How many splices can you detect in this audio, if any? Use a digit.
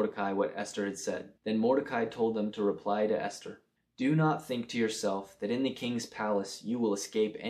2